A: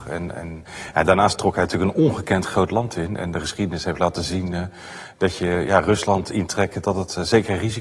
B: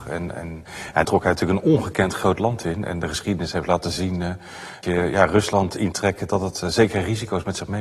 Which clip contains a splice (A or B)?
B